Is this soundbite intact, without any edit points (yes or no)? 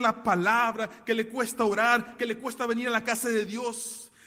yes